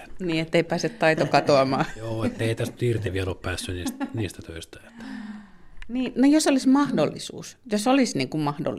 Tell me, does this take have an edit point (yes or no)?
no